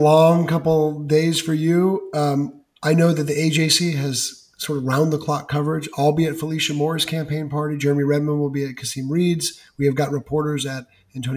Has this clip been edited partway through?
no; 0 cuts

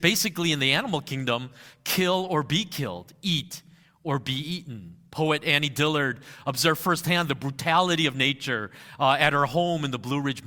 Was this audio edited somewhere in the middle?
no; 0 cuts

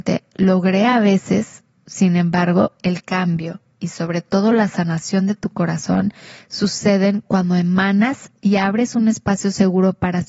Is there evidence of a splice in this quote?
no; 0 cuts

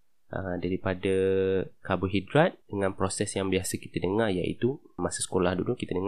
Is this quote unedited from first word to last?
no; 1 cut; at 2.6 s

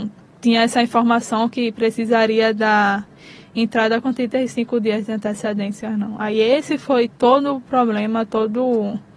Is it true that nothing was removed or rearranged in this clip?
yes; 0 cuts

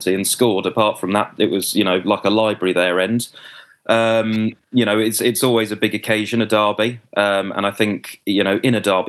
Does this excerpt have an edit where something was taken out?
no; 0 cuts

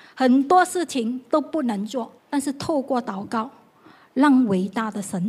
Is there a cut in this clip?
yes; 1 cut; at 2.2 s

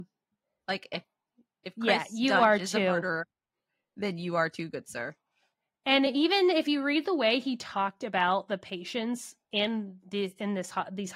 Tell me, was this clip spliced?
no; 0 cuts

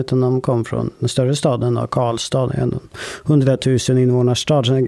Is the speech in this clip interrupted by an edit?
no; 0 cuts

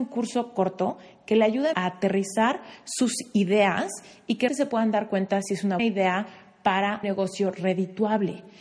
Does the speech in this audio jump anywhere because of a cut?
yes; 4 cuts; at 1.7 s, 4.5 s, 5.8 s, 7.0 s

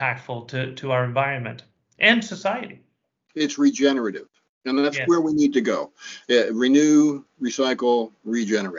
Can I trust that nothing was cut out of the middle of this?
yes; 0 cuts

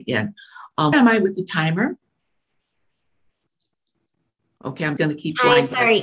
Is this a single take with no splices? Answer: no; 2 cuts; at 0.9 s, 5.0 s

